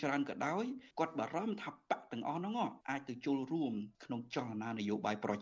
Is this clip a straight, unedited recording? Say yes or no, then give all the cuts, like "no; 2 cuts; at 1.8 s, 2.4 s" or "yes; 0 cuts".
no; 3 cuts; at 0.9 s, 2.8 s, 3.9 s